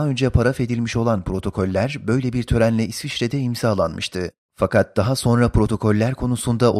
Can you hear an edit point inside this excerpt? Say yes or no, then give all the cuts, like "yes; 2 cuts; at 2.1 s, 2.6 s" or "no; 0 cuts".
no; 0 cuts